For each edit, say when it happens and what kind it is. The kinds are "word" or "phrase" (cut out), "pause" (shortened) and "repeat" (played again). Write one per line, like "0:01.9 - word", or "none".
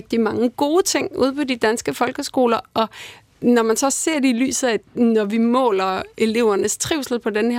0:04.9 - pause